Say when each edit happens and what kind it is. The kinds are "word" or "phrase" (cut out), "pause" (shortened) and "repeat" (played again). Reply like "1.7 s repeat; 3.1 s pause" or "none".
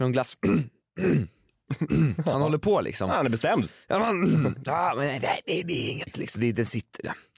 none